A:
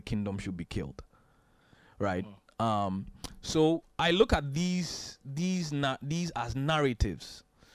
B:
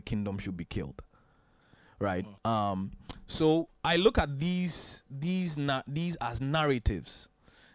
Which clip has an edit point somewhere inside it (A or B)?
B